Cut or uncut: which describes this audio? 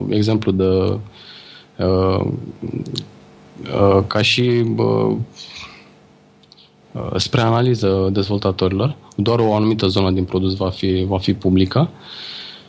uncut